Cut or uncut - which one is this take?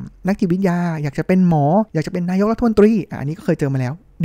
cut